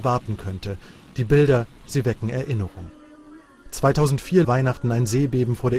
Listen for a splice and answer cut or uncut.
cut